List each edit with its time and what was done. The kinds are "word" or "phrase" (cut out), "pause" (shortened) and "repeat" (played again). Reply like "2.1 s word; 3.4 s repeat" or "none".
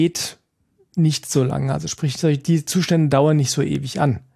none